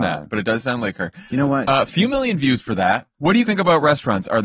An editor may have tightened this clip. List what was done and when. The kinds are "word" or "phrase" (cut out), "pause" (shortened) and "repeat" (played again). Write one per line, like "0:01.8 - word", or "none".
0:03.4 - word